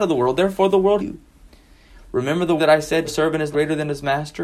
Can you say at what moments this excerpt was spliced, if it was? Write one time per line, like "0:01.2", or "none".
0:01.0
0:02.6
0:03.0
0:03.5